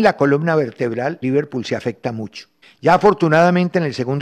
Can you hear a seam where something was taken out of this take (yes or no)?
yes